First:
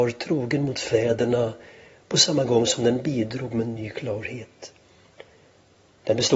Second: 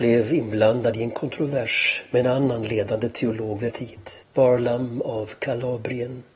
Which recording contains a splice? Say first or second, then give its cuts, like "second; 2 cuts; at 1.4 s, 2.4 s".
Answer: second; 2 cuts; at 3.7 s, 4.2 s